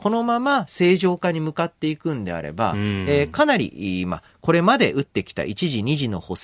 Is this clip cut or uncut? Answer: uncut